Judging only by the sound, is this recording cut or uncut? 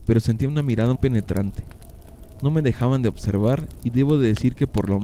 cut